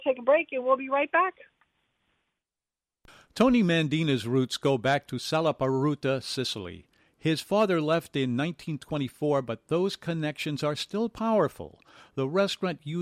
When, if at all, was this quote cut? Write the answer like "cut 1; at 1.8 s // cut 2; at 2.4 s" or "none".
none